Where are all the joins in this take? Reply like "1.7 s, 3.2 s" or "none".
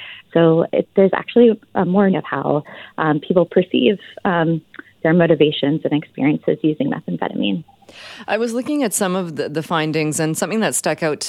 2.1 s